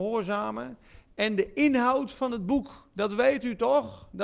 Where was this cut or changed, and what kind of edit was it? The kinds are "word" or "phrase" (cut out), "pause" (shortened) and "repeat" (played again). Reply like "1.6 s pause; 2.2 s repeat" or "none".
none